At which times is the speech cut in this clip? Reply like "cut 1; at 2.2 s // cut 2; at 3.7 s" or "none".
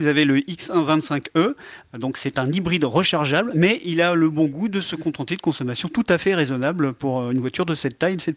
none